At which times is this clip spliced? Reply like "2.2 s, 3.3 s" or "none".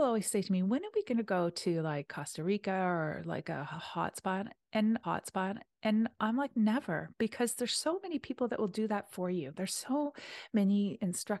5.0 s